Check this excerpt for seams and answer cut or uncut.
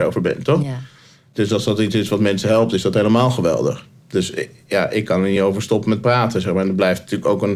uncut